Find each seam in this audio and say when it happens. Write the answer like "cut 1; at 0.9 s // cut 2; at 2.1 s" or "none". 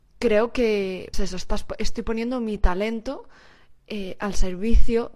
cut 1; at 1.1 s